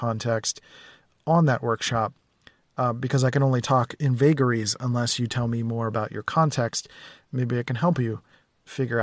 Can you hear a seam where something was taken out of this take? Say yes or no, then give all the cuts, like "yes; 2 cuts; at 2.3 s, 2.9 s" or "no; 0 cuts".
no; 0 cuts